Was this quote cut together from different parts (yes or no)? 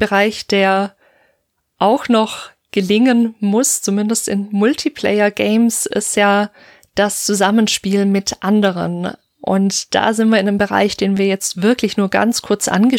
no